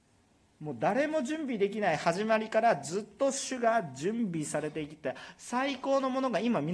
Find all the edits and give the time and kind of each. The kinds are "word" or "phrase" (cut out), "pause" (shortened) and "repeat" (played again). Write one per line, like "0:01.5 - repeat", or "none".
none